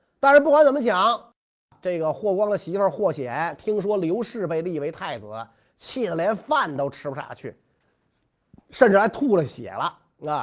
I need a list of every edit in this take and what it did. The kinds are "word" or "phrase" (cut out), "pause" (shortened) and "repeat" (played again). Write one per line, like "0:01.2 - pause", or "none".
none